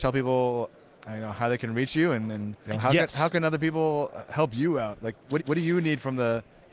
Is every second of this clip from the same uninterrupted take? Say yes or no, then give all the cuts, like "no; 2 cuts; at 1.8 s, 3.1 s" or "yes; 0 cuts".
no; 2 cuts; at 2.6 s, 5.4 s